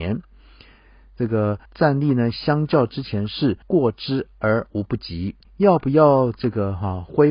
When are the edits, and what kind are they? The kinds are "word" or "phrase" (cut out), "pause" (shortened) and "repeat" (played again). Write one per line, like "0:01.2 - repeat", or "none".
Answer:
0:01.7 - pause
0:03.6 - pause
0:05.4 - pause